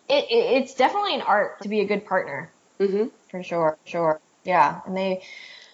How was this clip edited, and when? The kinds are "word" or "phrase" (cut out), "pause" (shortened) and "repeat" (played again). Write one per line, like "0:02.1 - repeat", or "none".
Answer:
0:01.6 - phrase
0:03.9 - repeat